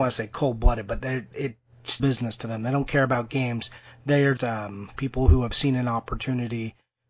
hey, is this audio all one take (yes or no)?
no